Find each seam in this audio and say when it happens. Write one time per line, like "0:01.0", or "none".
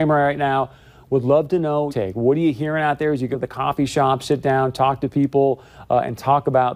0:01.9
0:03.3